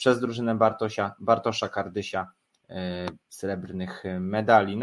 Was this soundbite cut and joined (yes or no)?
yes